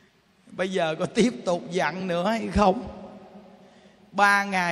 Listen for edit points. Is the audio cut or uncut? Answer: uncut